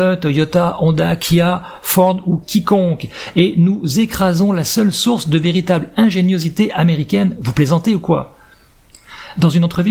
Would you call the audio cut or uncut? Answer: uncut